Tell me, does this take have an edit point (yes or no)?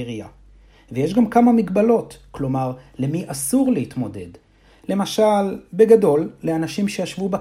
no